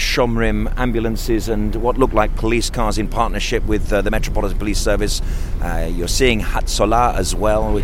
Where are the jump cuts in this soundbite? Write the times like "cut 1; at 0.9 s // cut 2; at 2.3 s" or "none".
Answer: none